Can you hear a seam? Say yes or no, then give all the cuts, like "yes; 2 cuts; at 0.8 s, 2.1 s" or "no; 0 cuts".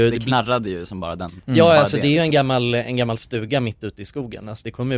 no; 0 cuts